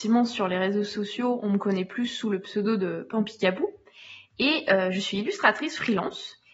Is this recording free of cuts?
yes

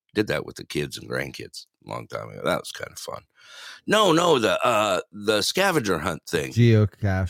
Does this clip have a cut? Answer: no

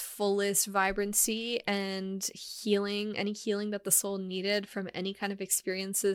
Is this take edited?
no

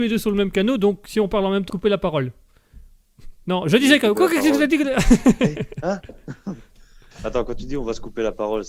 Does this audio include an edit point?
yes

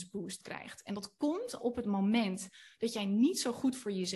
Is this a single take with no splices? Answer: no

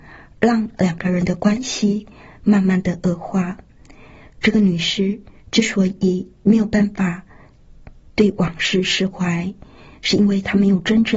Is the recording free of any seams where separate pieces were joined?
yes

